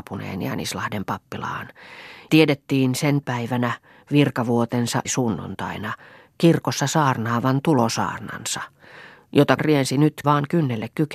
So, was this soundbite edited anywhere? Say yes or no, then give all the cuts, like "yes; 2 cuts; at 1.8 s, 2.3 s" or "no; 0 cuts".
yes; 5 cuts; at 2.3 s, 3.2 s, 5.0 s, 9.6 s, 10.2 s